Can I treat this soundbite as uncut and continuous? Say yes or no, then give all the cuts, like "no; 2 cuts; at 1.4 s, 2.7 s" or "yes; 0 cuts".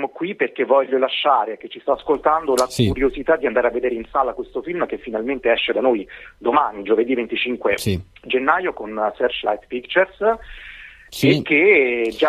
yes; 0 cuts